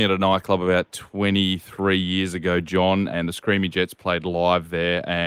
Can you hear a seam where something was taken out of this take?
yes; 1 cut; at 3.1 s

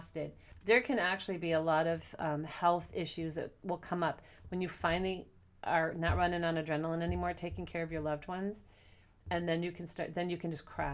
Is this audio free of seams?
yes; 0 cuts

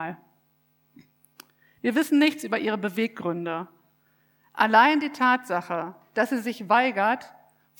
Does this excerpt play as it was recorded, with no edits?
yes; 0 cuts

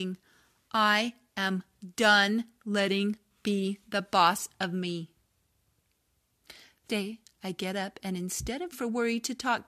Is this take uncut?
no; 3 cuts; at 3.3 s, 6.9 s, 8.7 s

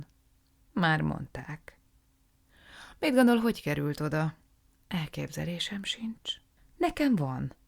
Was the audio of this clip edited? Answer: no; 0 cuts

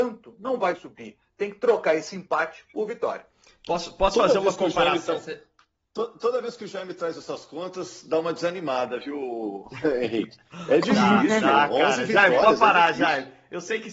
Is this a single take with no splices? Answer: yes; 0 cuts

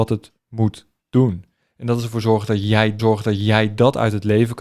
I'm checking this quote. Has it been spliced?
yes; 1 cut; at 3.0 s

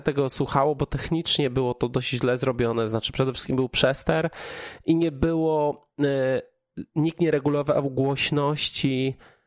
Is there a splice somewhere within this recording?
no; 0 cuts

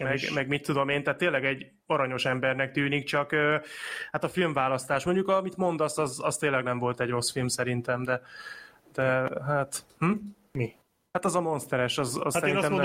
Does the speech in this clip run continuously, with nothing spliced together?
yes; 0 cuts

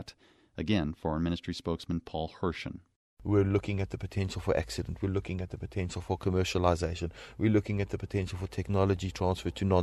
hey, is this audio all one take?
yes; 0 cuts

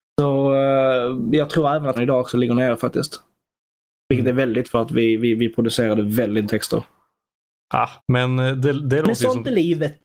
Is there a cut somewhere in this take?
yes; 4 cuts; at 1.9 s, 4.6 s, 6.4 s, 8.0 s

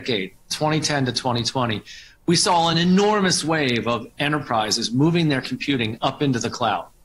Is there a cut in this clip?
no; 0 cuts

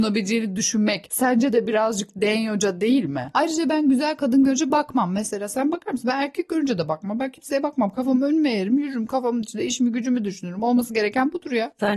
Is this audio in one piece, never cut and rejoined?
yes; 0 cuts

